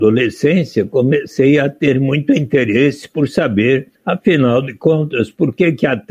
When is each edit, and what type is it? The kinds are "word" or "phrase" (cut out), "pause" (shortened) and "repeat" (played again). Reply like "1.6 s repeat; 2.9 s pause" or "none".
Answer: 3.9 s pause